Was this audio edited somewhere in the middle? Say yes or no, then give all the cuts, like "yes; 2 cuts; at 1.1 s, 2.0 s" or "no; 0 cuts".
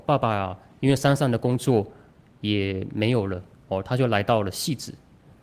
no; 0 cuts